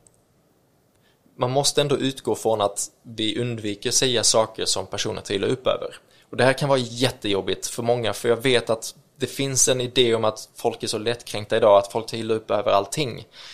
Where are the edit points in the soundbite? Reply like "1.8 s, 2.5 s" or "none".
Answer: none